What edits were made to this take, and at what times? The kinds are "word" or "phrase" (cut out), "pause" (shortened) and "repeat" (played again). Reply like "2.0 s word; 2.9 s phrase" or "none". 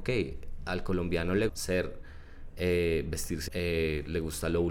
1.5 s word; 3.5 s word